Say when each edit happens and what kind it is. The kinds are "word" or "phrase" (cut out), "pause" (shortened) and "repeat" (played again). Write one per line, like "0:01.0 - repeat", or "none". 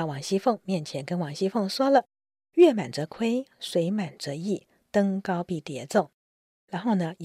none

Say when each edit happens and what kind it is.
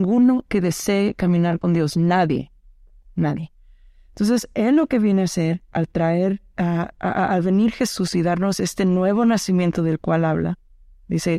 none

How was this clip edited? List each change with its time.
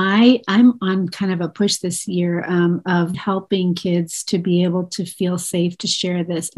0:03.1 - word

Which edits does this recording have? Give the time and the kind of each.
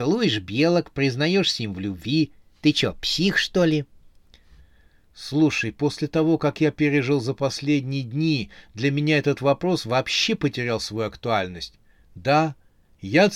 none

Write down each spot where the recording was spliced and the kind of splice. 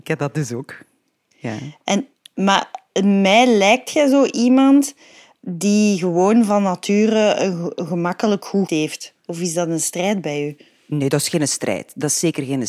0:08.7 - word

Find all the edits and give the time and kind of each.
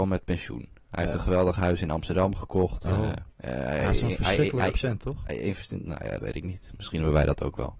0:03.3 - pause
0:06.2 - word

